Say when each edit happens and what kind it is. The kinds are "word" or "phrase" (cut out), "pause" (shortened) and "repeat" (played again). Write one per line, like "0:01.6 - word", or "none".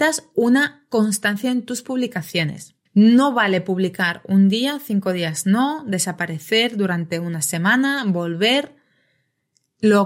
0:02.9 - pause